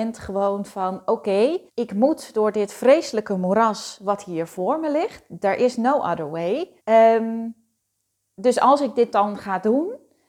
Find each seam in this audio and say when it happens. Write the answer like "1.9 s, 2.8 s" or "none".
1.7 s, 6.8 s